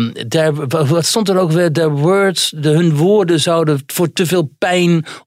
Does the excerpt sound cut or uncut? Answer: uncut